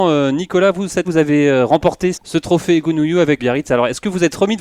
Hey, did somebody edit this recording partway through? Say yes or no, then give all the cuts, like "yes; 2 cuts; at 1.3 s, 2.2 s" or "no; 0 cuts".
yes; 3 cuts; at 1.0 s, 2.1 s, 3.4 s